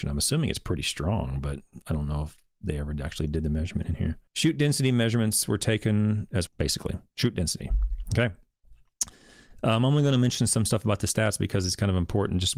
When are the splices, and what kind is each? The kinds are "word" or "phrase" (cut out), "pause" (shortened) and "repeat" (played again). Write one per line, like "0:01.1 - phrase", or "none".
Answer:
0:04.3 - pause
0:06.5 - word